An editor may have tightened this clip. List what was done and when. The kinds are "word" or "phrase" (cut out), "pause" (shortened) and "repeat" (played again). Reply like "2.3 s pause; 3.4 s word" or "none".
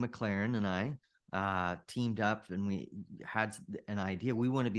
none